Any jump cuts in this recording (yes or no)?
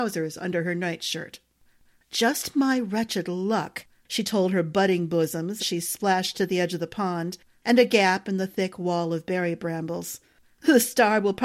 yes